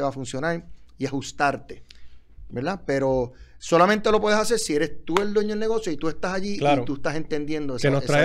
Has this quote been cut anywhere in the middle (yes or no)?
no